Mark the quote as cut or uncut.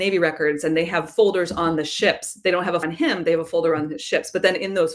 cut